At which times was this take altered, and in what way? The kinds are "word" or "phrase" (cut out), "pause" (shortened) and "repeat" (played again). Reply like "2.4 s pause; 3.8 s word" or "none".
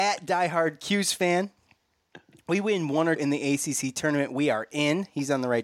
3.2 s word